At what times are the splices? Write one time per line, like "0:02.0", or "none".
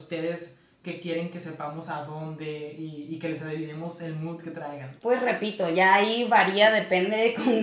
0:05.0

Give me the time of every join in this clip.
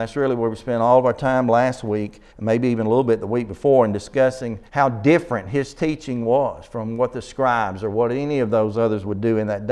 0:02.3
0:04.7

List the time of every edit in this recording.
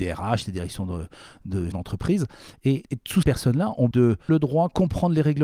0:01.7
0:02.8
0:03.2
0:03.9
0:04.3

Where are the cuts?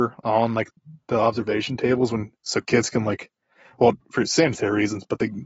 none

